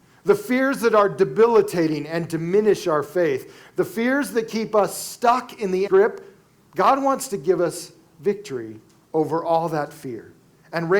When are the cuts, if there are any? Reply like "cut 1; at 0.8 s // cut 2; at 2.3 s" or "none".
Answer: cut 1; at 5.9 s

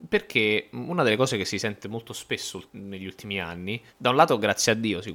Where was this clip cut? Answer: cut 1; at 2.7 s // cut 2; at 3.9 s

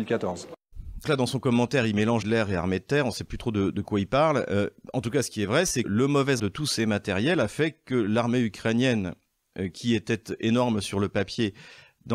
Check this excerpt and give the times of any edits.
cut 1; at 1.0 s // cut 2; at 2.2 s // cut 3; at 3.7 s // cut 4; at 5.8 s // cut 5; at 6.4 s

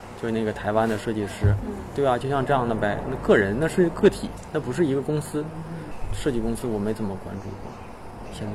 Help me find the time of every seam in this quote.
none

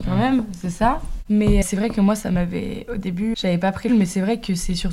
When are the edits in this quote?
cut 1; at 1.6 s // cut 2; at 3.3 s // cut 3; at 3.9 s

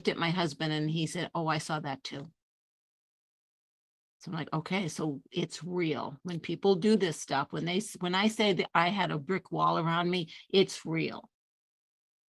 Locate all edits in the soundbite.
none

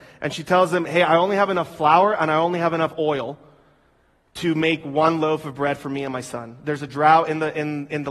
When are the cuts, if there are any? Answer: none

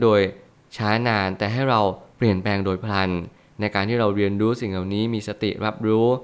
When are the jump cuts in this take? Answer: none

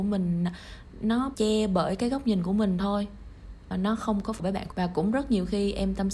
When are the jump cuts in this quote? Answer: cut 1; at 1.3 s // cut 2; at 3.7 s // cut 3; at 4.4 s // cut 4; at 4.7 s

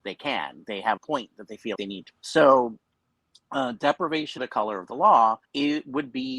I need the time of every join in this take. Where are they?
cut 1; at 1.0 s // cut 2; at 1.8 s // cut 3; at 2.1 s // cut 4; at 4.4 s // cut 5; at 5.4 s

